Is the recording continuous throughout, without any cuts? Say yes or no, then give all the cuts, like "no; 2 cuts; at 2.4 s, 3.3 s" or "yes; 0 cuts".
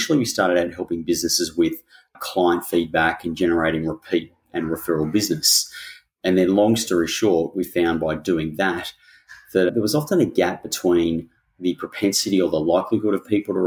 yes; 0 cuts